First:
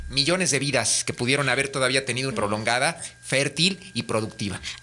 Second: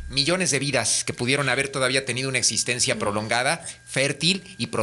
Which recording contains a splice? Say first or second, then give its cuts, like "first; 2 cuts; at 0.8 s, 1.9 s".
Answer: first; 1 cut; at 2.3 s